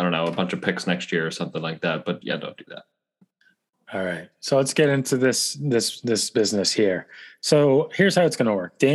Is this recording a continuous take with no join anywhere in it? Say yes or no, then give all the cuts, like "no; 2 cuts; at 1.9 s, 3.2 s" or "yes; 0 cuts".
no; 1 cut; at 2.2 s